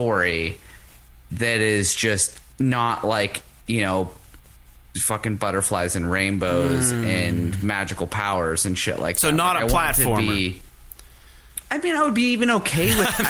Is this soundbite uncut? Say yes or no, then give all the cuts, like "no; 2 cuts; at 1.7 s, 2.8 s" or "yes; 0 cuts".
yes; 0 cuts